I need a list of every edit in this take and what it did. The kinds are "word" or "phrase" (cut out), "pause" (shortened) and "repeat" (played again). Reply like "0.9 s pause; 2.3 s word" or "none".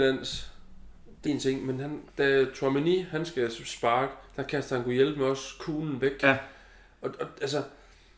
1.3 s word; 2.1 s pause